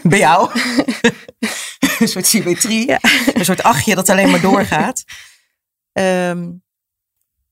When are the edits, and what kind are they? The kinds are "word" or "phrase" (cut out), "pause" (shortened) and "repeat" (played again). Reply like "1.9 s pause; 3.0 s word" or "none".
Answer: none